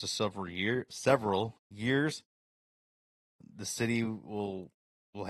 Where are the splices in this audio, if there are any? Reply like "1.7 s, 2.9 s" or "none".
none

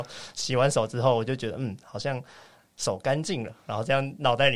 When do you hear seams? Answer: none

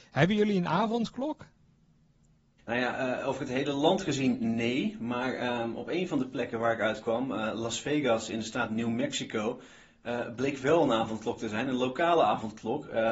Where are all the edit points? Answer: none

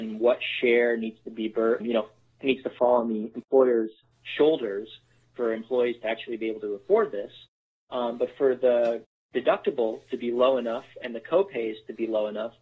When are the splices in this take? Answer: 1.8 s

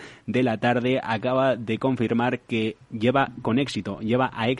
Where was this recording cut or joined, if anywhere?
2.8 s

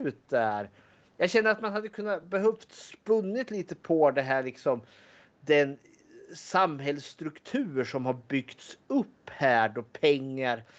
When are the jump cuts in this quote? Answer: none

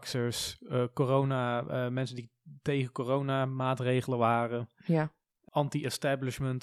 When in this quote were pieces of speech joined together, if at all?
none

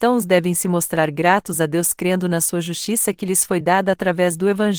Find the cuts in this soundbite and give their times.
none

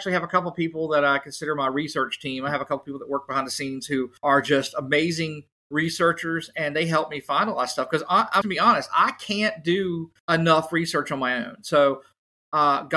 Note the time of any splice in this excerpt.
4.2 s, 8.4 s, 10.2 s

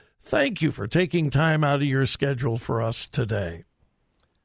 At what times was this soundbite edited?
none

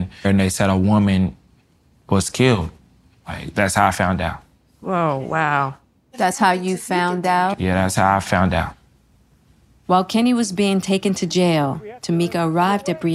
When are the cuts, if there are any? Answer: none

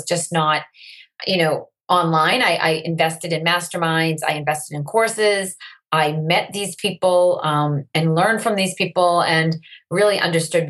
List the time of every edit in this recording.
1.2 s

